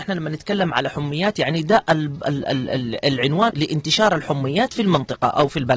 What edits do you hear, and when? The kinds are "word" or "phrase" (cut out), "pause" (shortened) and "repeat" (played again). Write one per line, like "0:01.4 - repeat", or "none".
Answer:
0:03.5 - word